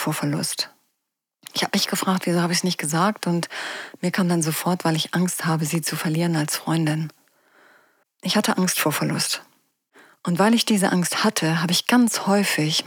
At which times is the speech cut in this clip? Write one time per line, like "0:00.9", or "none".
none